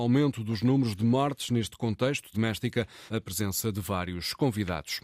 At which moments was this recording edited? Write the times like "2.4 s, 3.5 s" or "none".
2.3 s, 3.1 s